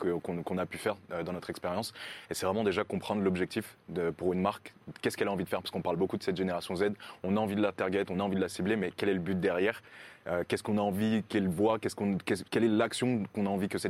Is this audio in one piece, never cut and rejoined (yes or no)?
no